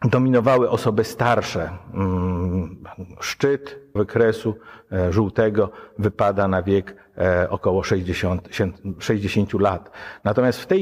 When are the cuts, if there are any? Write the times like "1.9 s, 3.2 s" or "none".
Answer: 4.0 s